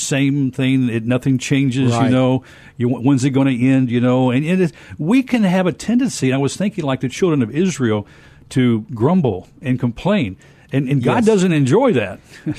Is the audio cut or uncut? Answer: uncut